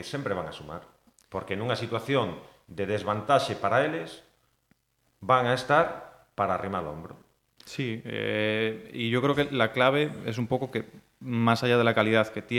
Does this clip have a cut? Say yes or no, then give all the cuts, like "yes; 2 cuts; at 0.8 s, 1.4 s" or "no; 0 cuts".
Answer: no; 0 cuts